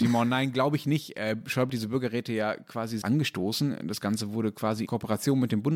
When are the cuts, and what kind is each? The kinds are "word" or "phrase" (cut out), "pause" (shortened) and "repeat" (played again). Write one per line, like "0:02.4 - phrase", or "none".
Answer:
0:01.7 - word
0:03.0 - word
0:04.9 - word